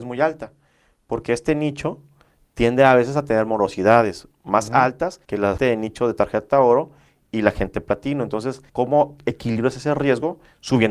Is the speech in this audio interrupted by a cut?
yes; 3 cuts; at 5.2 s, 5.6 s, 8.7 s

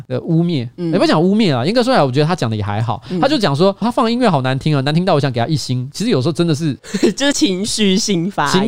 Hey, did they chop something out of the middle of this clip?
yes; 1 cut; at 3.8 s

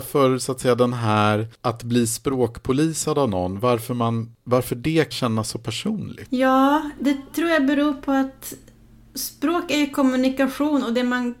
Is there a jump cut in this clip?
yes; 1 cut; at 5.1 s

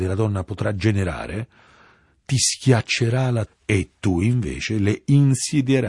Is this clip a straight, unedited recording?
no; 1 cut; at 3.5 s

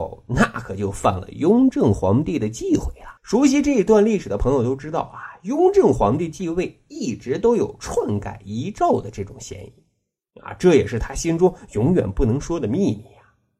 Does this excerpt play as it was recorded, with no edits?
no; 1 cut; at 3.2 s

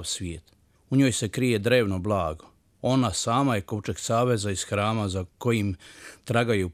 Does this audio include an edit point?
no; 0 cuts

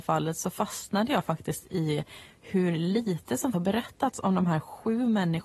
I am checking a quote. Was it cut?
yes; 1 cut; at 3.5 s

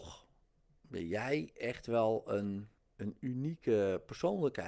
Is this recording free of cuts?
no; 1 cut; at 2.8 s

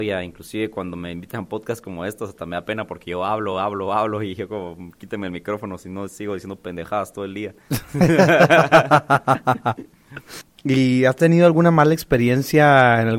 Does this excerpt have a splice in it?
no; 0 cuts

